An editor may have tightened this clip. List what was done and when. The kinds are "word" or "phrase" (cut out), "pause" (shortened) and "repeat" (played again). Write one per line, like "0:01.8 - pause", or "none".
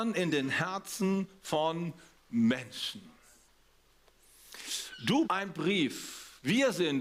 0:05.2 - word